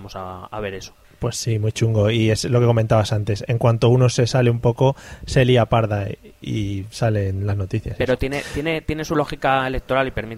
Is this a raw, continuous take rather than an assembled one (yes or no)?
no